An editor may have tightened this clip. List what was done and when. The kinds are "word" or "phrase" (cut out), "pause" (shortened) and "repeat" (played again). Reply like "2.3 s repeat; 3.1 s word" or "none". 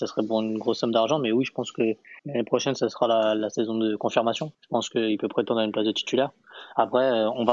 2.2 s pause; 4.5 s pause